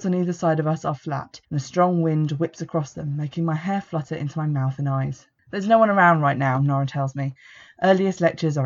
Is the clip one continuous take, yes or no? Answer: no